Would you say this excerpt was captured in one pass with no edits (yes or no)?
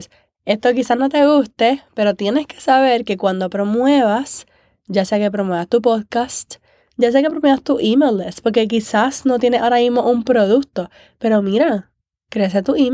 yes